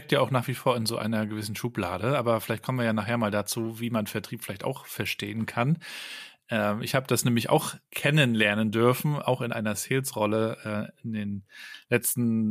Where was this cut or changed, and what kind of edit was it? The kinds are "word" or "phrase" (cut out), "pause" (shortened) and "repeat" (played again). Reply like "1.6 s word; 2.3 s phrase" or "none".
none